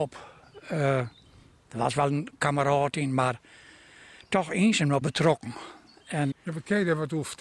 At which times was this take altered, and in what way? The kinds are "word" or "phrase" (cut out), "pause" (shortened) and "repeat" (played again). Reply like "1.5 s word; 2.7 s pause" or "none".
5.0 s word; 6.3 s word